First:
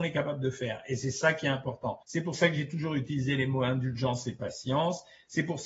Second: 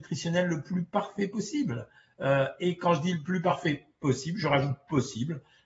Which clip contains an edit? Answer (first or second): first